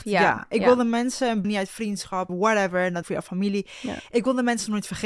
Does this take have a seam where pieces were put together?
yes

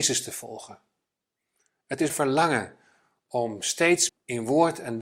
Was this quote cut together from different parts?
yes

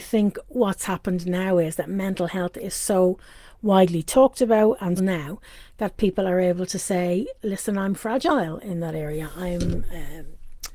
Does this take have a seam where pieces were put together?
yes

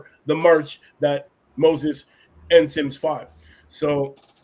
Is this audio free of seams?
yes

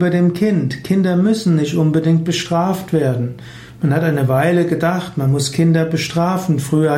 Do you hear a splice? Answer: no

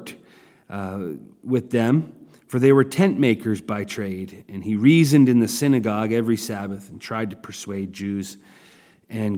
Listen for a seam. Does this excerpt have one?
no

